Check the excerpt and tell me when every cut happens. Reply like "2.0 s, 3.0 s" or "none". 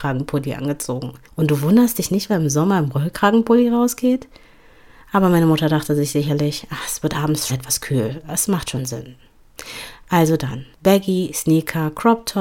1.2 s, 2.3 s, 7.5 s, 10.7 s

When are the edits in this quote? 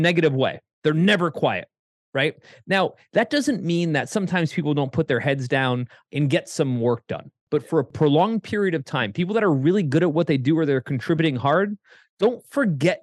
none

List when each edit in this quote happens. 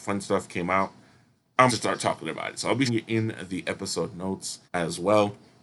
1.7 s, 2.9 s, 4.6 s

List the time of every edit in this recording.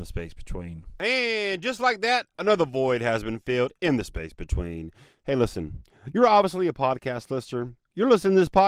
none

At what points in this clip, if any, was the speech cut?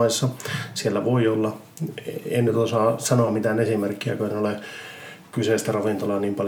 none

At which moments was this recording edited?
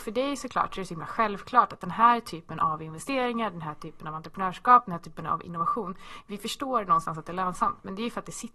none

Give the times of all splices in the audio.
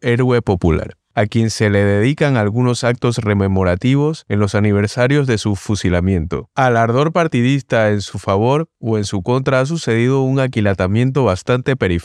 6.5 s

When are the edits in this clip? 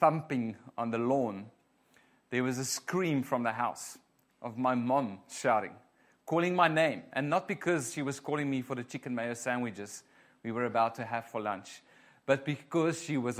none

